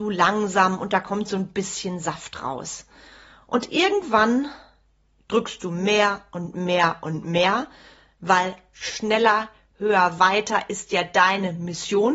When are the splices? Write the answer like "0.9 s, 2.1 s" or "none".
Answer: none